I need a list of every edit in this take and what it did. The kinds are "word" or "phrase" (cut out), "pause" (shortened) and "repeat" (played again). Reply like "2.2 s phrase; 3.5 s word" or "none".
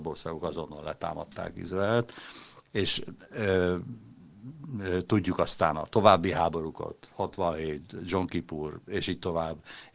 none